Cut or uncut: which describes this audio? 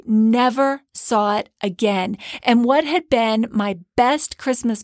uncut